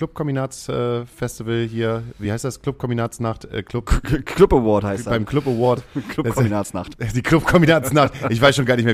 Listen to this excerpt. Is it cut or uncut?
uncut